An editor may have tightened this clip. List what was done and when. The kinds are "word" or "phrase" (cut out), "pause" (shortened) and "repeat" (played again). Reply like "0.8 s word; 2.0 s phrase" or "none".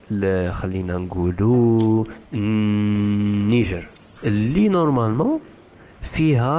4.2 s word